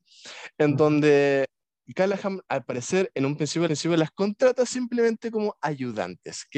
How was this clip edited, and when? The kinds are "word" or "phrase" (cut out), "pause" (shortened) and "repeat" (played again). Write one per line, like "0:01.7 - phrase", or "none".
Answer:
0:02.4 - pause
0:03.7 - repeat